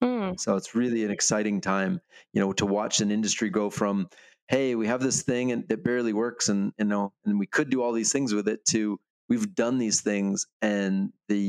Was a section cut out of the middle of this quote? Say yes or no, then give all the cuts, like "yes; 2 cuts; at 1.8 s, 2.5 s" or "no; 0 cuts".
no; 0 cuts